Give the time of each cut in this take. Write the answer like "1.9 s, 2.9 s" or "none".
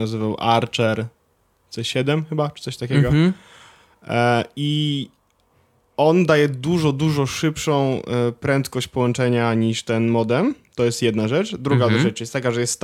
none